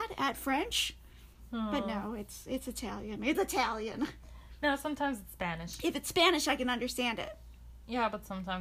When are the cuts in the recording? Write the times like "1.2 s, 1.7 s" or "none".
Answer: 3.3 s